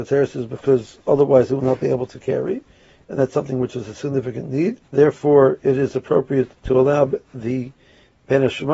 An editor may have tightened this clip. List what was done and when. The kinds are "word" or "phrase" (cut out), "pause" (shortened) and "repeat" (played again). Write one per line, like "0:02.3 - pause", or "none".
0:04.9 - pause
0:06.6 - pause